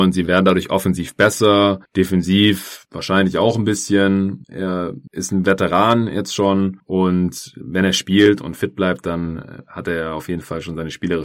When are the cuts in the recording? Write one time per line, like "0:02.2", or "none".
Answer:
none